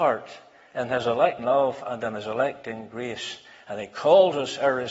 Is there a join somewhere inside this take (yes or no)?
yes